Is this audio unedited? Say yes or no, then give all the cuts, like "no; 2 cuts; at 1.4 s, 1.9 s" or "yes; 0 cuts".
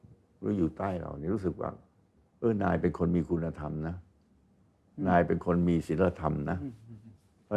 yes; 0 cuts